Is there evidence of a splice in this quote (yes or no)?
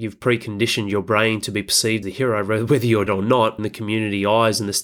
yes